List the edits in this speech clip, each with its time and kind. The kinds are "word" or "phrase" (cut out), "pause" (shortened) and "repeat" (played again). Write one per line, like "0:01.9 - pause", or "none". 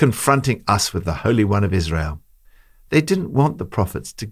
none